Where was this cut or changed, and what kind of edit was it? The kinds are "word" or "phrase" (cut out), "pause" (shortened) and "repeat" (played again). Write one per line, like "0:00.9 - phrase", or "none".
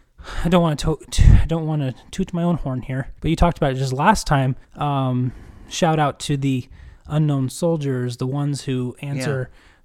0:03.2 - pause
0:04.6 - pause